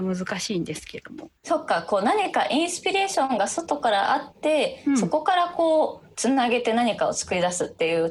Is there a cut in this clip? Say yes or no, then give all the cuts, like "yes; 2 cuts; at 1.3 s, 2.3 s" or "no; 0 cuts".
yes; 1 cut; at 1.4 s